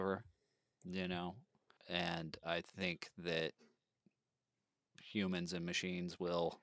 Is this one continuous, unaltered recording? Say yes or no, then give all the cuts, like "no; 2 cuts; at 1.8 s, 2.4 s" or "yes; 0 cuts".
no; 1 cut; at 1.8 s